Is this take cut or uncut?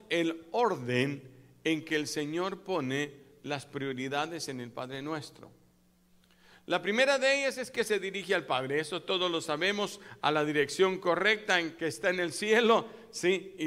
uncut